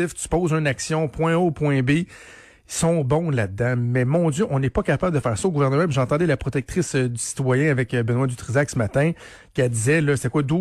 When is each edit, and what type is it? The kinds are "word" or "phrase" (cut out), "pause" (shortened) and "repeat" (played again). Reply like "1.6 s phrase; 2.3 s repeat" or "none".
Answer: none